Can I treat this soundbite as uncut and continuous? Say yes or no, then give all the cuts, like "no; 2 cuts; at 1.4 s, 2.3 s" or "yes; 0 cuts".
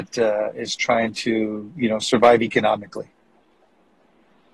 yes; 0 cuts